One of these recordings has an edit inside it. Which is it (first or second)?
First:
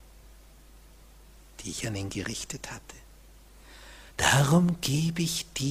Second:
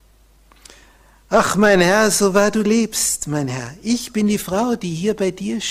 first